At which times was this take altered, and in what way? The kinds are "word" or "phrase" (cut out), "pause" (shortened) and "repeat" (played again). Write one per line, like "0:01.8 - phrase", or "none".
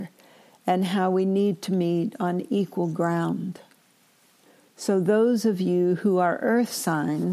none